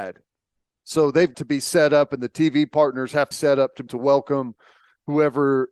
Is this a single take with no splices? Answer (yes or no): no